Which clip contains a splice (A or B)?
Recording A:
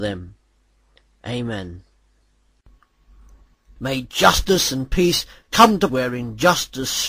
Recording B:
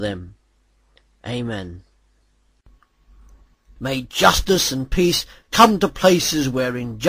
A